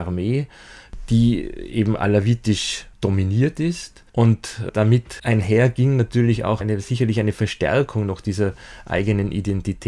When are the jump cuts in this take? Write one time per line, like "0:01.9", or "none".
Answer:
0:02.9
0:04.1